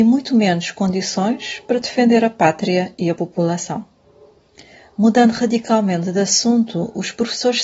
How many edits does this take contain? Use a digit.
0